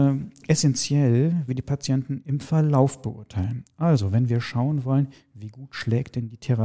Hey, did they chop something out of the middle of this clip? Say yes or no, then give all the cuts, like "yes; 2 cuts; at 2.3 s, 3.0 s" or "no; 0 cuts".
yes; 1 cut; at 1.5 s